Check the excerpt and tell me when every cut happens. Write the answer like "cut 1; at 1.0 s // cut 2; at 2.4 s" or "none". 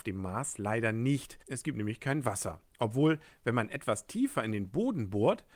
cut 1; at 1.4 s // cut 2; at 2.7 s